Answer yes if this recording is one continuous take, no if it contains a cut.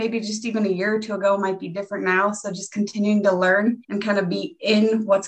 no